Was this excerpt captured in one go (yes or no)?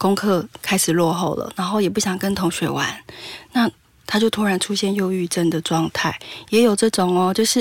yes